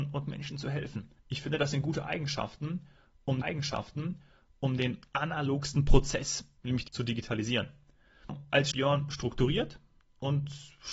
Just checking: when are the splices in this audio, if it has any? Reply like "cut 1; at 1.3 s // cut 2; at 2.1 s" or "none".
cut 1; at 1.2 s // cut 2; at 3.4 s // cut 3; at 6.6 s // cut 4; at 6.9 s // cut 5; at 8.7 s